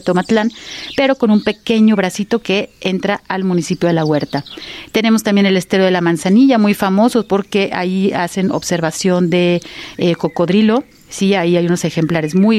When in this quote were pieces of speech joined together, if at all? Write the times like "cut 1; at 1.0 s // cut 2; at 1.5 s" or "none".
none